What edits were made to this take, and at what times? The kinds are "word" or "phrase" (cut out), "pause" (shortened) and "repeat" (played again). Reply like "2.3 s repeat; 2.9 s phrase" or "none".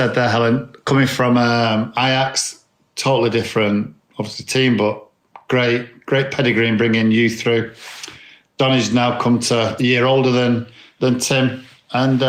9.8 s phrase